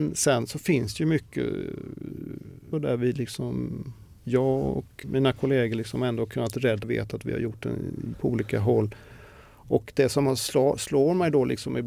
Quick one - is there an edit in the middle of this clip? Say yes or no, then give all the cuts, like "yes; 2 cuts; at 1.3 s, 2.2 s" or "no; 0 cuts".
yes; 5 cuts; at 2.7 s, 4.2 s, 5.0 s, 6.8 s, 8.1 s